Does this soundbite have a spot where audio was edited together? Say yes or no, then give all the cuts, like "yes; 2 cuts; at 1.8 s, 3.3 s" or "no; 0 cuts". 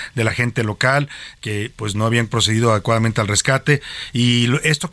no; 0 cuts